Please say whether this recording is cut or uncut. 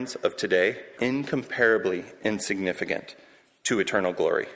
cut